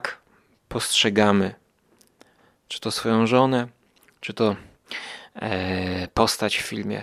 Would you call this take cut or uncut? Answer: uncut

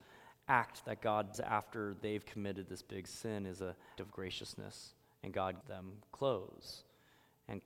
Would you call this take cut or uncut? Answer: cut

